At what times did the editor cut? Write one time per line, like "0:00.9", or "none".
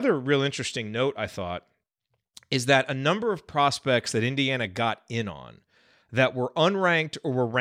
none